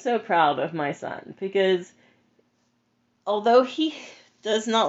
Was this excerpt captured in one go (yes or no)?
yes